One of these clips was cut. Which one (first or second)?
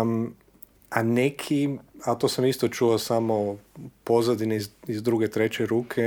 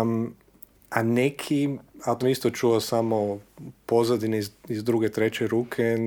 second